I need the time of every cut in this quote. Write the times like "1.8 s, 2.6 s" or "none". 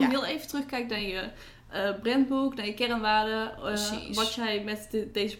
none